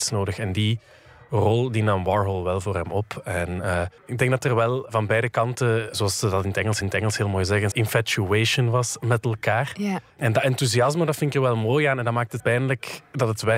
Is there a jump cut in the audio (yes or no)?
yes